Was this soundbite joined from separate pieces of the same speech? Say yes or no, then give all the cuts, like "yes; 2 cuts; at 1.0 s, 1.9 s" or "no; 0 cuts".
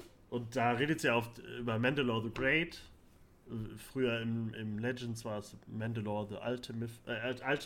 no; 0 cuts